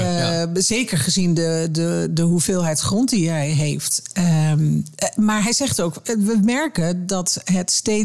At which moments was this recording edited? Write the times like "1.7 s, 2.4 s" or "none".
none